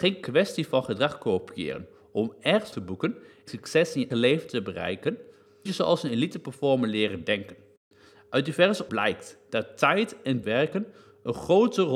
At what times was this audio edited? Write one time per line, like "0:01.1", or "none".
0:02.7
0:03.5
0:04.1
0:05.7
0:08.9
0:10.4